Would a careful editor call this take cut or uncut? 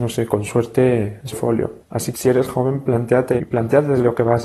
cut